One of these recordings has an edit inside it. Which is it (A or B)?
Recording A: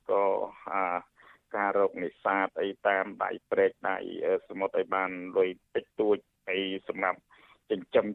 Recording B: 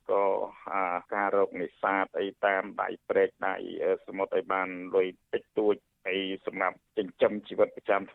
B